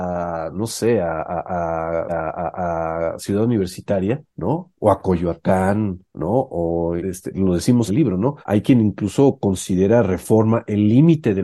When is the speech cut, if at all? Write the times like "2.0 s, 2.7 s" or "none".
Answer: 2.1 s, 4.3 s, 6.1 s, 7.0 s, 7.9 s, 8.4 s